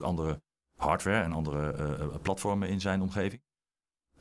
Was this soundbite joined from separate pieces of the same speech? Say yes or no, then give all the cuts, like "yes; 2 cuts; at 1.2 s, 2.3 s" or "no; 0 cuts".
no; 0 cuts